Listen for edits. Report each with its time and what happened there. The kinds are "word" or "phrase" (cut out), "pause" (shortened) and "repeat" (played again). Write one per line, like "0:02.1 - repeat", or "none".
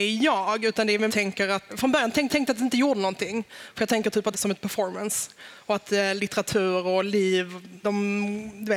0:01.1 - phrase
0:01.7 - word
0:02.3 - repeat
0:04.3 - phrase
0:07.8 - word

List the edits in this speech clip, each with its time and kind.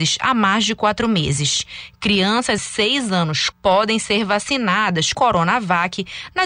0:02.6 - phrase
0:03.5 - word
0:05.1 - word

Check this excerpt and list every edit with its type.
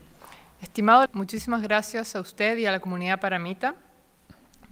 0:01.1 - word

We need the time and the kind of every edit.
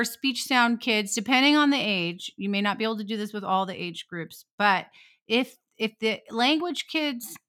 none

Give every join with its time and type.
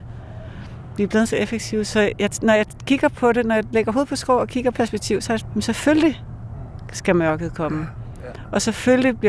0:04.7 - phrase
0:05.4 - word

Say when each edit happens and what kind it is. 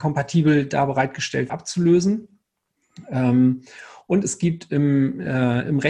0:01.5 - word

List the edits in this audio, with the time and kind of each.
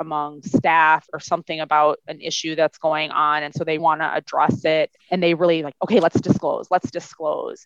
0:01.1 - word
0:03.8 - word
0:05.0 - pause

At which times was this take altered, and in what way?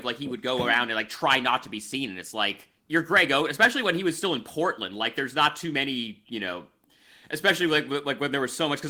0:02.8 - pause

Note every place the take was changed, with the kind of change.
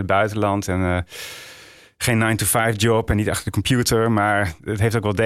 none

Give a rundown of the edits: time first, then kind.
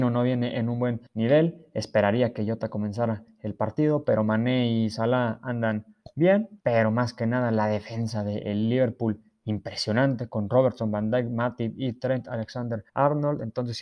0:01.1 - pause
0:06.6 - pause
0:12.9 - pause

